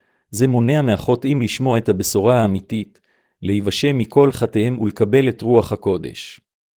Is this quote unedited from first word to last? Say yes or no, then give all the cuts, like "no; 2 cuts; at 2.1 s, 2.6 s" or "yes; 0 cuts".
yes; 0 cuts